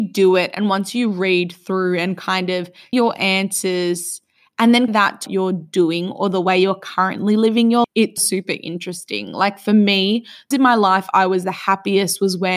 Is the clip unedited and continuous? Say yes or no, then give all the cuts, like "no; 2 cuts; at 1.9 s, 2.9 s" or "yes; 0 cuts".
no; 6 cuts; at 2.9 s, 4.9 s, 5.3 s, 7.8 s, 8.2 s, 10.5 s